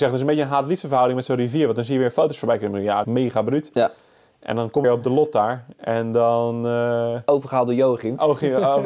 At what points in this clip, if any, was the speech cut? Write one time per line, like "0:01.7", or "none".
0:03.0
0:04.8